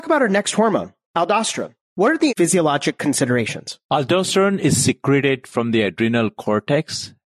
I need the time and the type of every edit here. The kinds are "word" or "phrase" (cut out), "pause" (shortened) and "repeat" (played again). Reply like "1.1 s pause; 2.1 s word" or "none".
1.8 s pause; 2.3 s word; 3.8 s pause